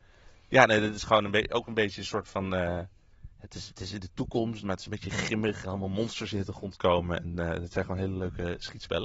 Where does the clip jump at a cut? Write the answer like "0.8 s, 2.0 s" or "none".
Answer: 3.3 s, 5.6 s